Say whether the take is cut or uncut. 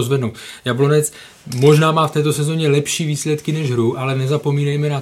uncut